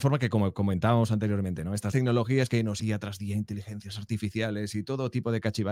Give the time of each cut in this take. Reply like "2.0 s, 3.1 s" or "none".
1.9 s, 2.8 s